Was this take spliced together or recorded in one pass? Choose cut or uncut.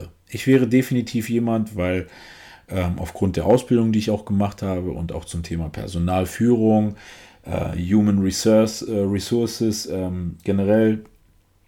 uncut